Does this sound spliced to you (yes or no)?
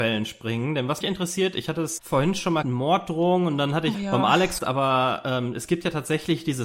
yes